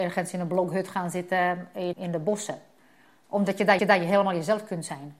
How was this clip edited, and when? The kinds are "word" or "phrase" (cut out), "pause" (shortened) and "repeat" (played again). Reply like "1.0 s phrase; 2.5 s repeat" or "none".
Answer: 1.9 s word; 3.8 s repeat

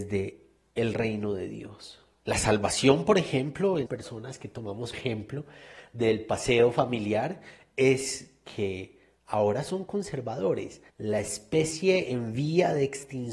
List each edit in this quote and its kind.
3.9 s word; 4.9 s word; 9.2 s pause; 10.9 s pause

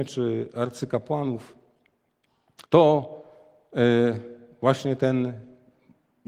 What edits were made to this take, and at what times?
2.7 s pause

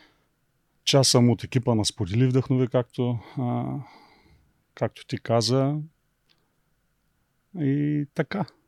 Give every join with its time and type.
none

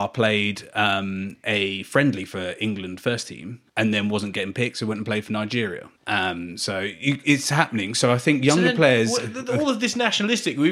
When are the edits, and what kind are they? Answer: 3.7 s pause; 6.0 s pause

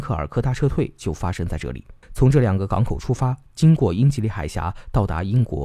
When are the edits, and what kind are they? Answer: 2.0 s pause

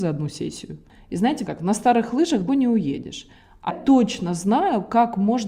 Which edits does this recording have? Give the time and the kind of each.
1.5 s phrase; 2.5 s word; 3.7 s word

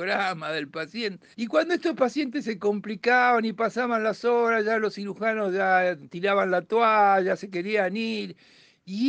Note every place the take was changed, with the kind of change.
1.3 s pause

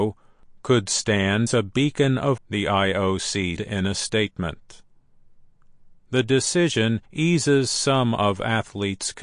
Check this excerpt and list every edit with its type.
1.5 s word; 2.4 s word; 3.6 s word; 7.1 s pause

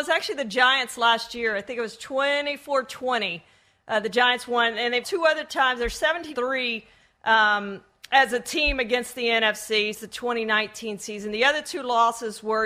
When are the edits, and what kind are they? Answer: 5.0 s word; 6.3 s word; 9.9 s word

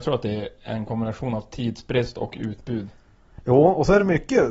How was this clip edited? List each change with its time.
none

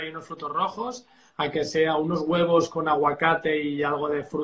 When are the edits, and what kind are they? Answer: none

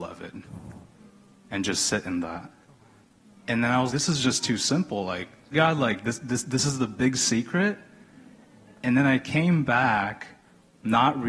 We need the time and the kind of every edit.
3.9 s word; 5.5 s phrase

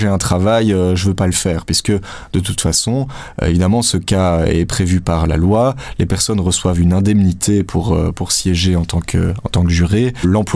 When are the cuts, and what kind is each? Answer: none

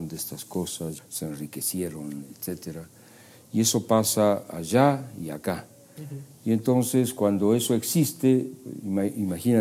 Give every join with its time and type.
1.0 s phrase

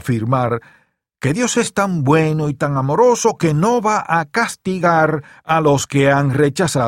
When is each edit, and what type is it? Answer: none

